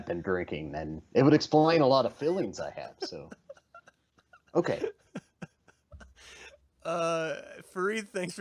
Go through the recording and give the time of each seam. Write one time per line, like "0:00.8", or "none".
none